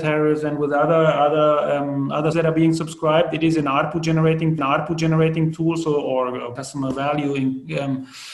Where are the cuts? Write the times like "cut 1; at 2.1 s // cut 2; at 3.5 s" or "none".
cut 1; at 2.3 s // cut 2; at 4.6 s // cut 3; at 6.6 s